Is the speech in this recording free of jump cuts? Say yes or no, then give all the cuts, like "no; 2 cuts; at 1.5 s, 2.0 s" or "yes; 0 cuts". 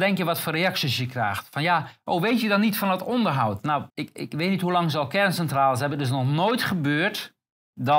no; 1 cut; at 3.9 s